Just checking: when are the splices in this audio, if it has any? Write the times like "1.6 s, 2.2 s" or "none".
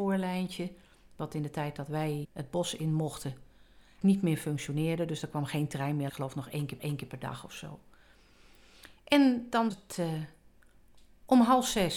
2.2 s, 4.0 s, 6.1 s, 6.8 s, 9.7 s